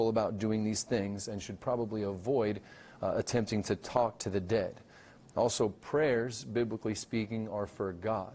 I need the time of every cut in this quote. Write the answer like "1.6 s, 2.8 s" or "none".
none